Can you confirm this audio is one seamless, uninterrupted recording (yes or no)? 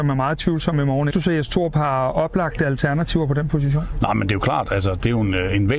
no